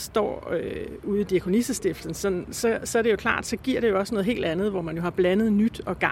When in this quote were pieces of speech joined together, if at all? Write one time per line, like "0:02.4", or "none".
none